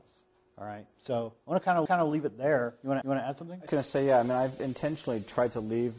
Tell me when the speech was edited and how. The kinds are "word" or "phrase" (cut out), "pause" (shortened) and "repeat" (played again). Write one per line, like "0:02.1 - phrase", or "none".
0:01.9 - repeat
0:03.0 - repeat
0:03.7 - word